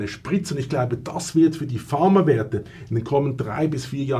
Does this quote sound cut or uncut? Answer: uncut